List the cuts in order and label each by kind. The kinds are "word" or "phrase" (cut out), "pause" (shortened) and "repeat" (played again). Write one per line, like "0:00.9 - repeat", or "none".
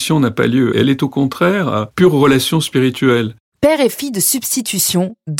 none